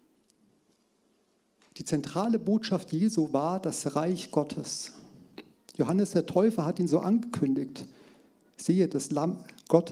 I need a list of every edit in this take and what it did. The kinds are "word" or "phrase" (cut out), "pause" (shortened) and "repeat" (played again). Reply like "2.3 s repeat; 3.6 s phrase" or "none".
none